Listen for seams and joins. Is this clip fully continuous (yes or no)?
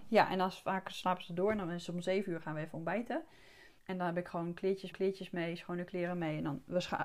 no